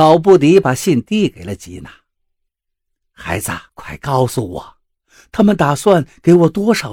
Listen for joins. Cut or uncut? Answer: cut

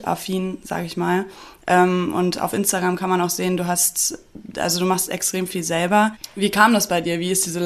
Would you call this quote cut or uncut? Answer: uncut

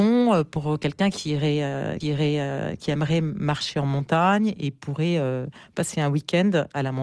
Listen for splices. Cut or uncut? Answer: cut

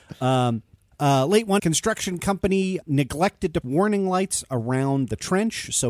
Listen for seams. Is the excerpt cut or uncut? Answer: cut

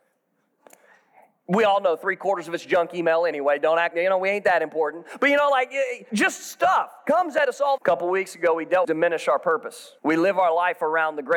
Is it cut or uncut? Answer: cut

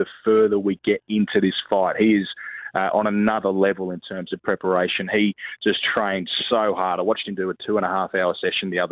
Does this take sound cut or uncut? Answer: uncut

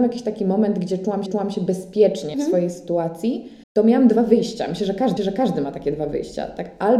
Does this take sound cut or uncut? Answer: cut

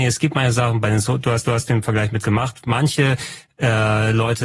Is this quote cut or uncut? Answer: cut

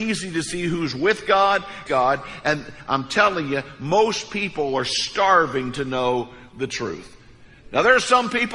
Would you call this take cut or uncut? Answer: cut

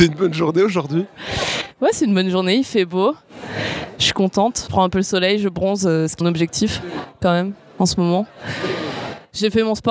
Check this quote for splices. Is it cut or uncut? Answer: cut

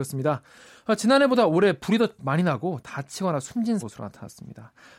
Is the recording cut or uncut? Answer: cut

